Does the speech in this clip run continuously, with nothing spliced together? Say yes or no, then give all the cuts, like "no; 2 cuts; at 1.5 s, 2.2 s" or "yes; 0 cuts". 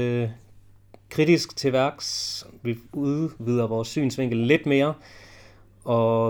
no; 1 cut; at 2.9 s